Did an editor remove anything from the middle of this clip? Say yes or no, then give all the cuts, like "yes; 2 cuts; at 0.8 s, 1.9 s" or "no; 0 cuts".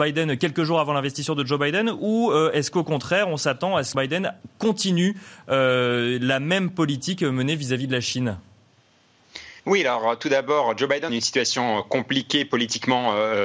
yes; 3 cuts; at 3.9 s, 9.6 s, 11.1 s